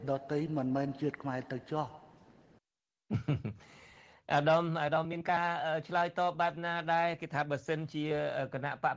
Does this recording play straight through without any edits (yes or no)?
yes